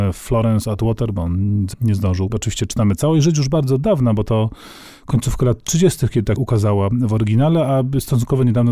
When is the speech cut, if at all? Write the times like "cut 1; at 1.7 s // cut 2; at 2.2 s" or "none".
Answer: cut 1; at 1.7 s // cut 2; at 2.3 s // cut 3; at 6.4 s